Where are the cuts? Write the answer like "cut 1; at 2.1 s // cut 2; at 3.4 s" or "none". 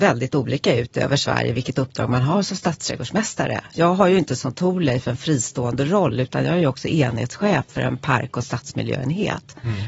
none

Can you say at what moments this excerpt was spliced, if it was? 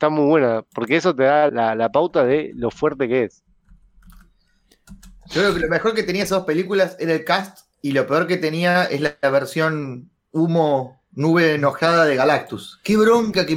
cut 1; at 1.5 s // cut 2; at 7.7 s

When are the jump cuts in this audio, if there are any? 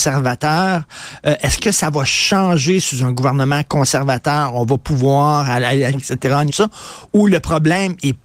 cut 1; at 5.9 s // cut 2; at 6.5 s

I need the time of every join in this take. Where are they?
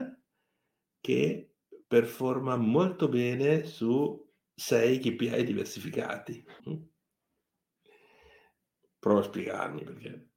cut 1; at 1.8 s // cut 2; at 4.5 s // cut 3; at 6.6 s

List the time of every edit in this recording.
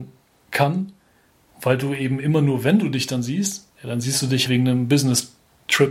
cut 1; at 4.5 s

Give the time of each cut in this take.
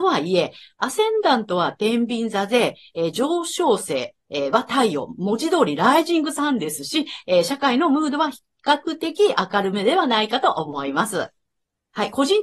none

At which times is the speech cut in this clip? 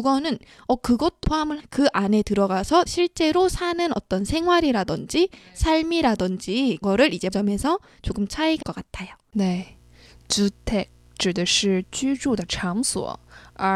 cut 1; at 1.2 s // cut 2; at 1.6 s // cut 3; at 2.9 s // cut 4; at 6.8 s // cut 5; at 7.3 s // cut 6; at 8.6 s

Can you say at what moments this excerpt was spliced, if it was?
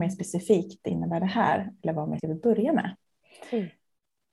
cut 1; at 2.2 s

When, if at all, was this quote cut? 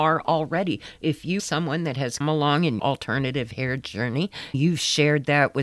cut 1; at 1.4 s // cut 2; at 2.2 s // cut 3; at 2.8 s // cut 4; at 4.5 s

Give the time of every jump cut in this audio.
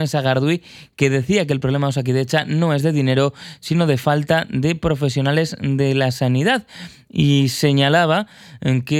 none

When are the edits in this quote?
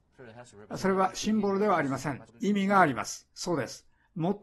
cut 1; at 2.3 s // cut 2; at 3.3 s

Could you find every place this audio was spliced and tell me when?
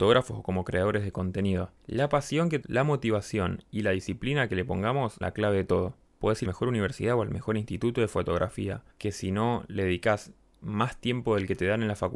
cut 1; at 1.8 s // cut 2; at 2.6 s // cut 3; at 5.2 s // cut 4; at 6.1 s // cut 5; at 6.5 s // cut 6; at 8.9 s

